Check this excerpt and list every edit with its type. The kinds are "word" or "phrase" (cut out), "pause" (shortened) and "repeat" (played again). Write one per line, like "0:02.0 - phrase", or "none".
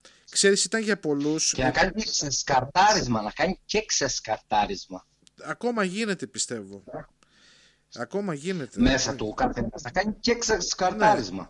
none